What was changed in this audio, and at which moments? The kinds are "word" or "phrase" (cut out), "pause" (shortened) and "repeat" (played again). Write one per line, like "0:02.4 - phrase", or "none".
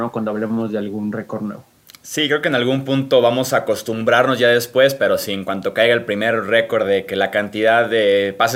none